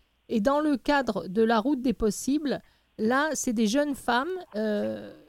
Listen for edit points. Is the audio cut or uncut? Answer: uncut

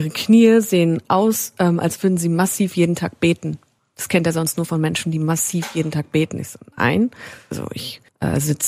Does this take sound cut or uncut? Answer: uncut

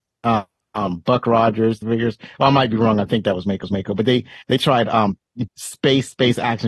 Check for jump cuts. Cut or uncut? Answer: cut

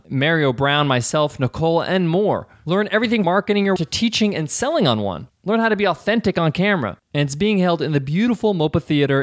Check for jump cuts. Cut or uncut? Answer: cut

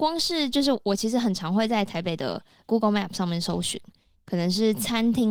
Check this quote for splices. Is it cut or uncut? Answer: uncut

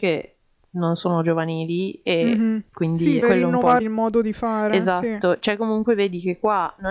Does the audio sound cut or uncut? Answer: cut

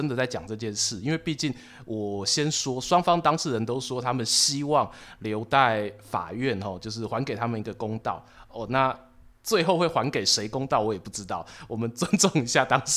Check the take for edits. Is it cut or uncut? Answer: uncut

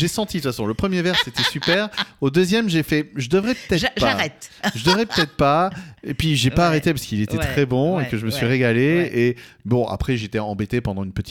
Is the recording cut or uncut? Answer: uncut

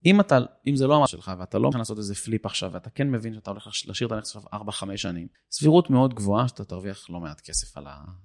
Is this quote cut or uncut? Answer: cut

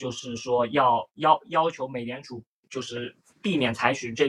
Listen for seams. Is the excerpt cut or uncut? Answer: uncut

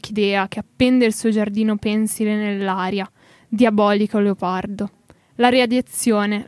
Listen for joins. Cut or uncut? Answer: uncut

